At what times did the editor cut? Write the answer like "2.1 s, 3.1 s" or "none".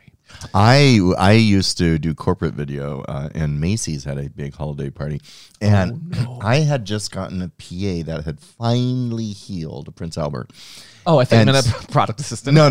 none